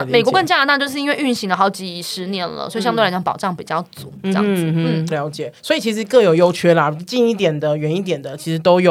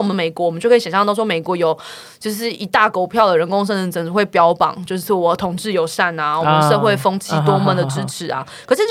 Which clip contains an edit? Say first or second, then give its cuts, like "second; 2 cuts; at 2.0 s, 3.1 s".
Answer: first; 2 cuts; at 5.1 s, 5.6 s